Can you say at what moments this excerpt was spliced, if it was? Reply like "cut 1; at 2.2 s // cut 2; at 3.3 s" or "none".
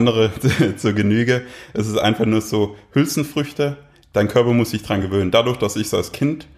none